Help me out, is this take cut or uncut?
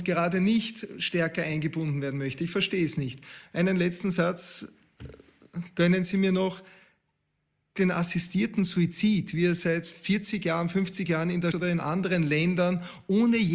cut